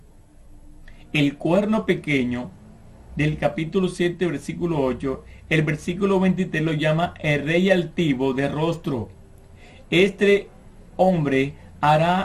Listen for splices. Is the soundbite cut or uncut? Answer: uncut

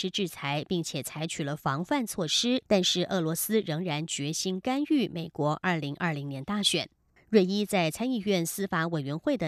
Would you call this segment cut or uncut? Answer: cut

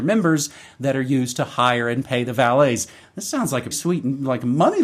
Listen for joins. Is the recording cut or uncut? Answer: cut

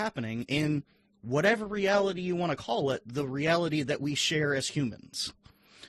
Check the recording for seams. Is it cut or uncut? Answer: uncut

